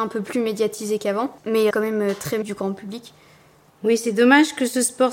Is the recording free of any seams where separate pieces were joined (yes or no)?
no